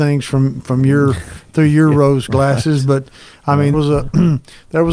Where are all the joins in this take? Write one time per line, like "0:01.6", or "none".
0:02.3
0:03.7

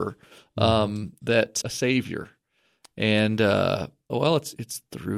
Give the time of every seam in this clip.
0:01.6

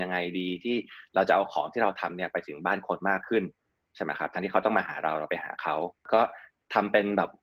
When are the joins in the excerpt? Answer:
none

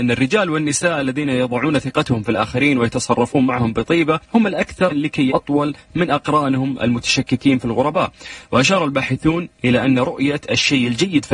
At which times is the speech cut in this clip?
0:04.2
0:04.9
0:05.3

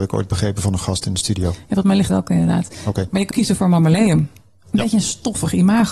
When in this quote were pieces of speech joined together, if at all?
0:02.1
0:03.3

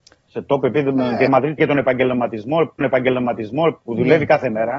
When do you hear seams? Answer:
0:01.3
0:01.6
0:02.8

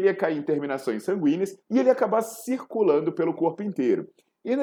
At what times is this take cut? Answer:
0:01.6

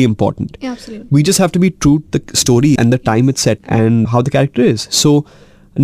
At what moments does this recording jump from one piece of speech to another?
0:02.1
0:02.8
0:03.6
0:04.0

